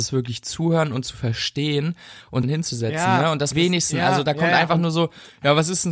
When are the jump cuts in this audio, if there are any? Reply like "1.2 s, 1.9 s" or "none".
2.4 s, 3.5 s